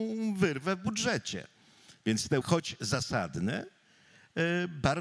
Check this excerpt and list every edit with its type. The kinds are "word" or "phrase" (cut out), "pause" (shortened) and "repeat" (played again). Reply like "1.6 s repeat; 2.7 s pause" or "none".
2.4 s word